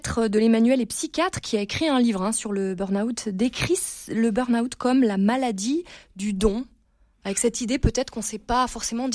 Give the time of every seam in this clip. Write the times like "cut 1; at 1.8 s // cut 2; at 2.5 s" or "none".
none